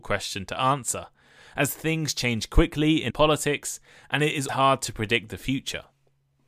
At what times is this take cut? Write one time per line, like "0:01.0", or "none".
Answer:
0:03.1
0:04.5